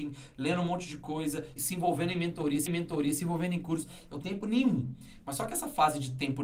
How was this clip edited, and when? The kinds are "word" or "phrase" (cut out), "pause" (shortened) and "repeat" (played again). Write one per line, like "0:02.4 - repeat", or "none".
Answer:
0:01.6 - word
0:02.7 - repeat
0:04.2 - word

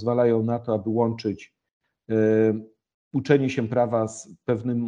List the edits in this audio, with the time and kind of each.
none

